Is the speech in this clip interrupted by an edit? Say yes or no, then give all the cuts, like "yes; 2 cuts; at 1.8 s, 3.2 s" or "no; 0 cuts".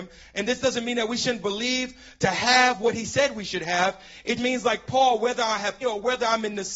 yes; 2 cuts; at 4.4 s, 5.8 s